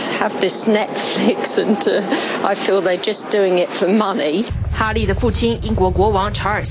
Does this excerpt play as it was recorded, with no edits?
yes; 0 cuts

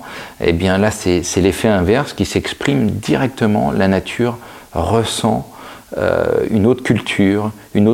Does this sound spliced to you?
no; 0 cuts

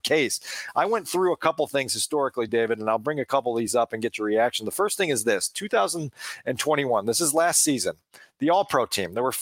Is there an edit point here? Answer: no; 0 cuts

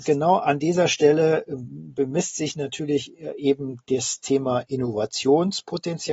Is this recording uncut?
yes; 0 cuts

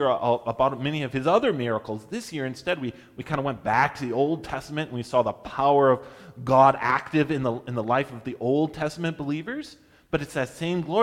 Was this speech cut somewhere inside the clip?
no; 0 cuts

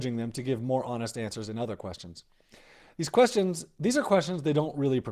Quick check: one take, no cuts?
yes; 0 cuts

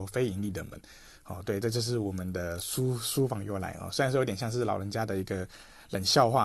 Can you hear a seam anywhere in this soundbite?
no; 0 cuts

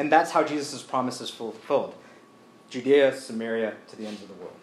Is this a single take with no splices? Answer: yes; 0 cuts

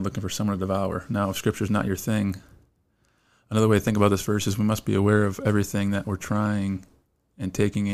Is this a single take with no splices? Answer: yes; 0 cuts

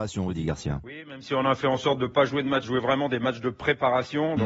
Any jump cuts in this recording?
yes; 1 cut; at 2.6 s

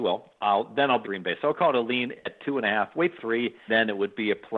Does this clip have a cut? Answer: yes; 3 cuts; at 1.0 s, 3.2 s, 3.7 s

